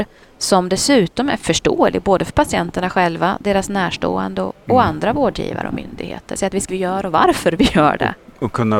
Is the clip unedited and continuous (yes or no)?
no